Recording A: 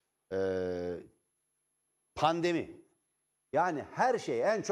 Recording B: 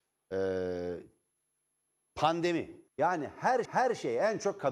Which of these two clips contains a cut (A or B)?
B